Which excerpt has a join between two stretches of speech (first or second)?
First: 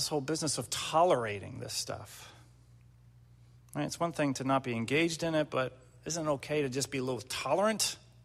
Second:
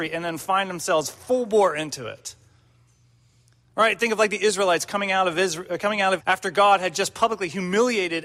second